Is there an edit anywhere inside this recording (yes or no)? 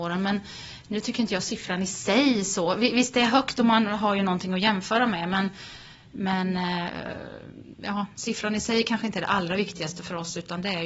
no